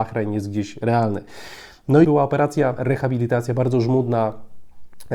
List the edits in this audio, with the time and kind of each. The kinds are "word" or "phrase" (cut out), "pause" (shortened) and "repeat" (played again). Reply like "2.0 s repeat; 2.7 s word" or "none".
2.0 s word; 2.8 s word